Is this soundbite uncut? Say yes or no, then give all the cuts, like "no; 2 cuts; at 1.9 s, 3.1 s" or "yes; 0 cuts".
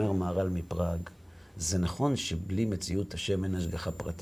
yes; 0 cuts